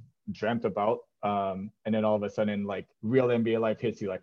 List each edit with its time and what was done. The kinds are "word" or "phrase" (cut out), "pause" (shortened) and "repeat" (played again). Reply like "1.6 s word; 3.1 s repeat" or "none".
2.9 s pause